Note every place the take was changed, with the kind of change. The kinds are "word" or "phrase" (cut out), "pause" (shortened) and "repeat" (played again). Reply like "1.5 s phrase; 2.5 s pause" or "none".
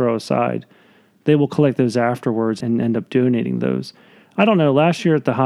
2.6 s word